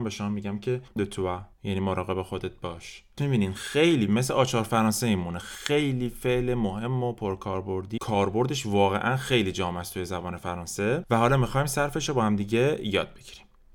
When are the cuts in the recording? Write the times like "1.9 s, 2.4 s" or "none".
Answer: 1.0 s, 1.5 s, 3.2 s, 8.0 s